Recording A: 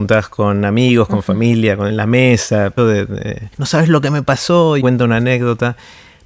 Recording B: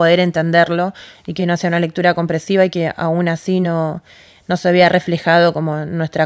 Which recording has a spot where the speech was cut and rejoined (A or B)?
A